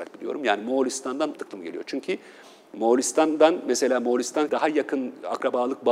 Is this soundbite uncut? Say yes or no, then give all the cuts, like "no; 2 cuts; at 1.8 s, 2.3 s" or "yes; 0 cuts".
no; 2 cuts; at 1.3 s, 4.5 s